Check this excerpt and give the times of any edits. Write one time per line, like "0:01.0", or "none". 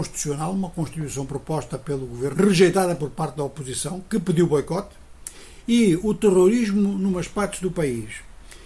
0:02.3